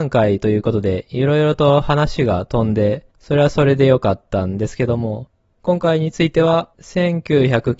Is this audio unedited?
no; 2 cuts; at 3.1 s, 6.7 s

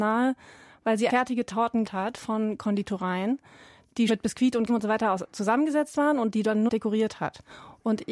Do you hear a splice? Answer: yes; 5 cuts; at 1.1 s, 1.8 s, 4.1 s, 4.7 s, 6.7 s

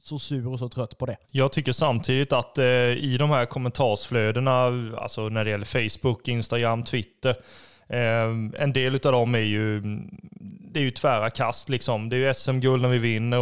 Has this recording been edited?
yes; 1 cut; at 1.2 s

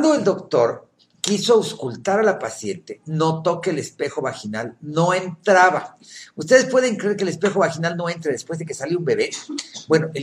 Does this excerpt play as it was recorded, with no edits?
yes; 0 cuts

